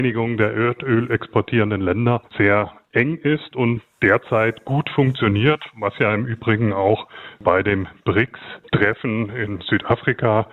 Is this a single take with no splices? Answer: no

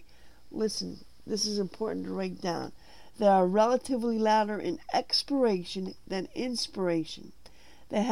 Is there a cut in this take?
no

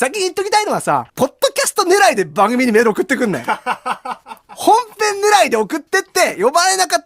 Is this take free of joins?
no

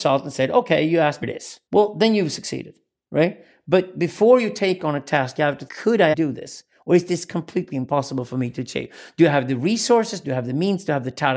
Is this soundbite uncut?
no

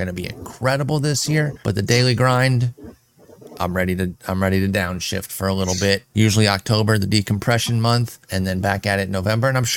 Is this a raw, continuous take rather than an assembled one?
no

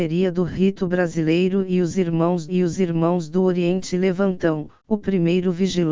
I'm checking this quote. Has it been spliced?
yes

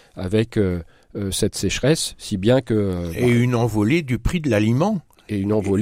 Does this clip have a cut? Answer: no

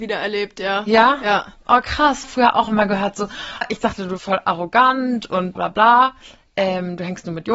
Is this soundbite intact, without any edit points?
no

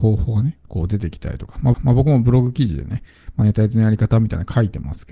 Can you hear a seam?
yes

